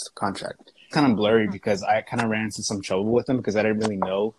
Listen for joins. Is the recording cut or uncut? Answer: cut